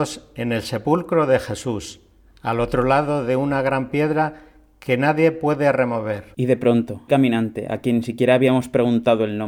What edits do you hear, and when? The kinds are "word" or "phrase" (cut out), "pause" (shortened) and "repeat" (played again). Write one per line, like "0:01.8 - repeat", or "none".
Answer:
0:07.1 - word